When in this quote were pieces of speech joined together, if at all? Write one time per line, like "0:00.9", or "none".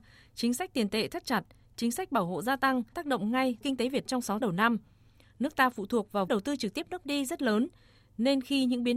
0:02.9
0:03.6
0:04.1
0:04.4
0:06.3
0:07.0